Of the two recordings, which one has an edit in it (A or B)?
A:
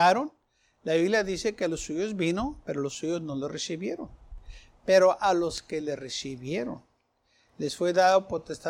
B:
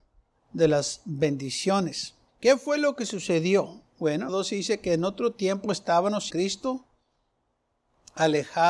B